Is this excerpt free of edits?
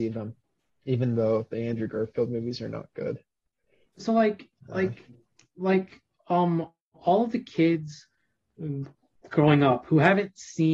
yes; 0 cuts

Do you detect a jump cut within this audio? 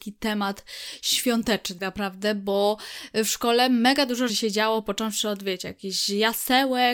yes; 2 cuts; at 1.8 s, 4.3 s

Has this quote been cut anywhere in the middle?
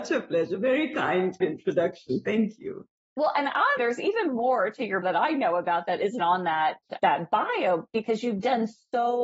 yes; 5 cuts; at 1.4 s, 3.8 s, 5.0 s, 6.2 s, 7.0 s

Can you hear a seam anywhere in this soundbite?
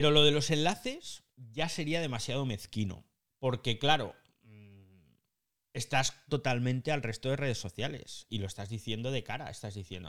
yes; 3 cuts; at 1.3 s, 3.3 s, 6.3 s

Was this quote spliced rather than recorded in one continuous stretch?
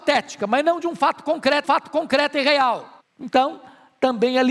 yes; 2 cuts; at 1.6 s, 3.0 s

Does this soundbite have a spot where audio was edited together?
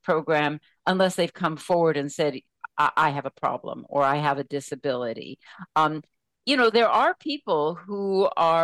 no; 0 cuts

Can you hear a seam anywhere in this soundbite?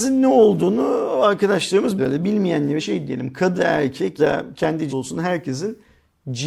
yes; 5 cuts; at 2.0 s, 2.8 s, 3.6 s, 4.2 s, 4.9 s

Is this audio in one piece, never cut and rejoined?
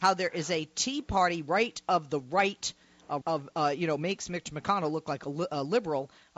no; 1 cut; at 3.2 s

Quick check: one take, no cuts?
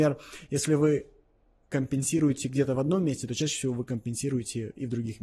yes; 0 cuts

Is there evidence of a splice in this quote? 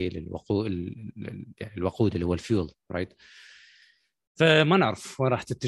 no; 0 cuts

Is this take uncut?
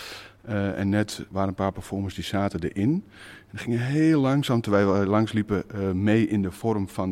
yes; 0 cuts

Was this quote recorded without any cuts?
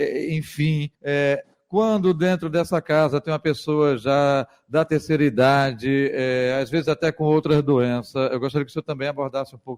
no; 1 cut; at 0.9 s

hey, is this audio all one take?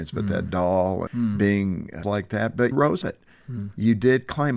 no; 4 cuts; at 1.1 s, 2.0 s, 2.7 s, 3.0 s

